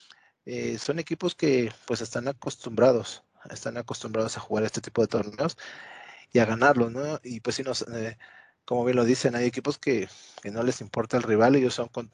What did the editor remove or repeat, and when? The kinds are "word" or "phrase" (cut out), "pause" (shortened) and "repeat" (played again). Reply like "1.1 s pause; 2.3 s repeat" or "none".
none